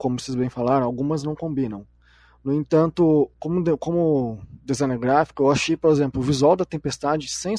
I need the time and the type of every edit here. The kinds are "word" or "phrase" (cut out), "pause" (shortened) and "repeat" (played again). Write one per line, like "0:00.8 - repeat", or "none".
none